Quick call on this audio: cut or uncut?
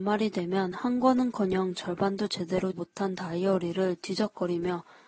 cut